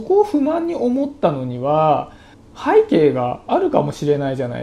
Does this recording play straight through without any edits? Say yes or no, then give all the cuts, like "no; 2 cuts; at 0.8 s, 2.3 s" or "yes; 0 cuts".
no; 1 cut; at 2.3 s